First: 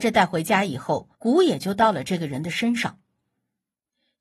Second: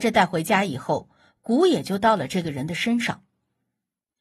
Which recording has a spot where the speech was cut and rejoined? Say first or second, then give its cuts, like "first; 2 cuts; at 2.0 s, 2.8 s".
first; 1 cut; at 1.1 s